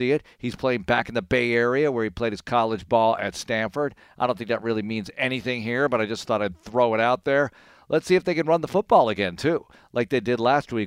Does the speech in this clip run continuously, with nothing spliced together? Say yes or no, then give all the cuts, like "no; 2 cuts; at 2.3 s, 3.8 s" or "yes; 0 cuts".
yes; 0 cuts